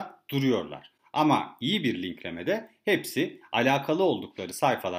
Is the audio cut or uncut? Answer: uncut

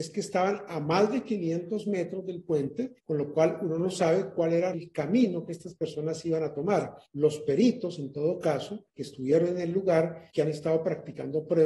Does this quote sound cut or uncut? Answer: cut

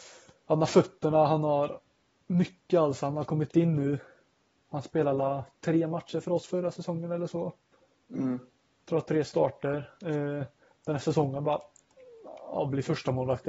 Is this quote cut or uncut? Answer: uncut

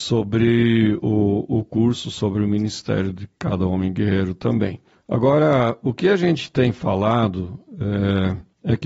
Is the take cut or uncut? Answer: uncut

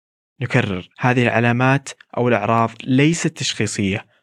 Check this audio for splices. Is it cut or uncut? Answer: cut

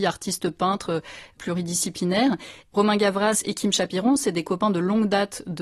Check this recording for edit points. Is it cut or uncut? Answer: uncut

